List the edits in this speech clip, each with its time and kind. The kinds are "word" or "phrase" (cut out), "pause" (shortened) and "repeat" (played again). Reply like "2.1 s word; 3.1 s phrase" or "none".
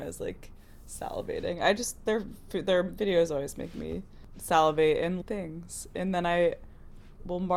5.2 s phrase

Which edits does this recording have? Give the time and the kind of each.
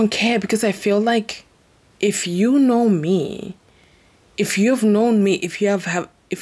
none

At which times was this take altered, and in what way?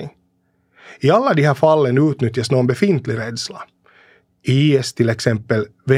none

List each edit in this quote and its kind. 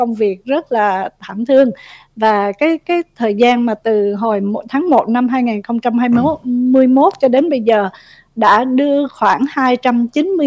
none

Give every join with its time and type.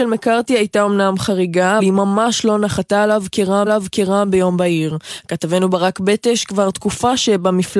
1.8 s word; 3.7 s repeat

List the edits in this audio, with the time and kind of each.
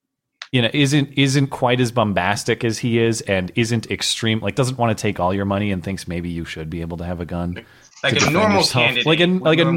none

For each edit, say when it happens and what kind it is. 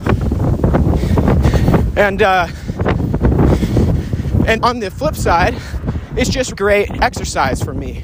4.6 s word; 6.5 s word

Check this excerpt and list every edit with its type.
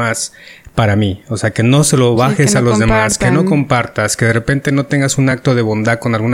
none

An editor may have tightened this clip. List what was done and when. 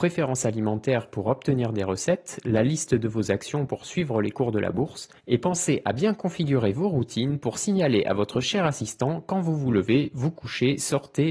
5.2 s pause

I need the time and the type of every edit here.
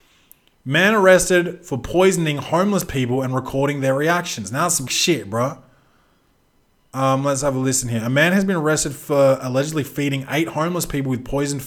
4.9 s phrase

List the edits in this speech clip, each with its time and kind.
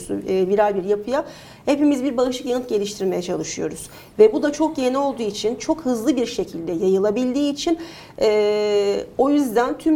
none

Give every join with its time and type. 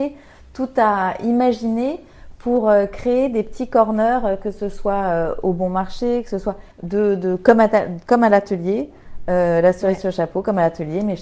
6.7 s pause

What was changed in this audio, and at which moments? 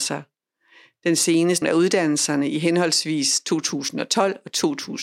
1.6 s word

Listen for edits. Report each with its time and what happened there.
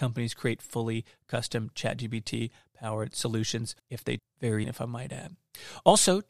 3.8 s pause; 4.2 s word; 4.6 s word

